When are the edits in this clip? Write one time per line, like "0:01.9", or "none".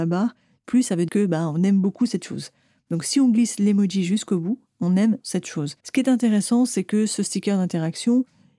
0:01.1
0:05.2
0:05.8